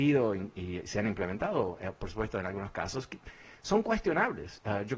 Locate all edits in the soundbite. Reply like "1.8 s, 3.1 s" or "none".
none